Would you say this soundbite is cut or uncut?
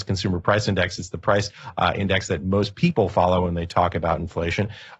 uncut